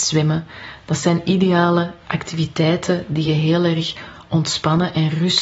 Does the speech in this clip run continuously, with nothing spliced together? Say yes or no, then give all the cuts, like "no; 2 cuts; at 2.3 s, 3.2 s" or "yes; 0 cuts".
yes; 0 cuts